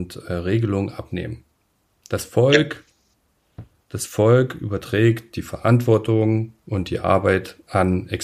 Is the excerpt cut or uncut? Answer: uncut